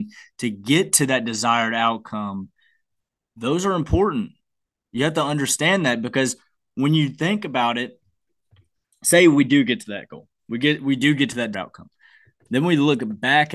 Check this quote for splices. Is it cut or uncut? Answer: cut